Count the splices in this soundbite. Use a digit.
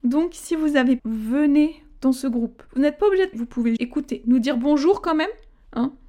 4